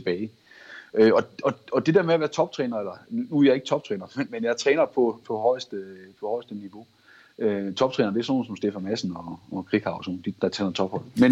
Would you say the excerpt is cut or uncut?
cut